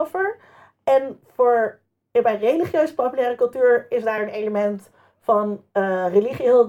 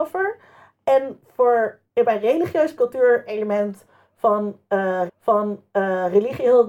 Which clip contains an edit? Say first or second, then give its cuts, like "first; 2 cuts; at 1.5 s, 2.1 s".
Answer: second; 4 cuts; at 1.9 s, 2.8 s, 3.3 s, 5.1 s